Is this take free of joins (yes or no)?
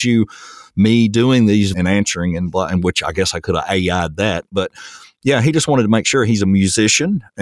no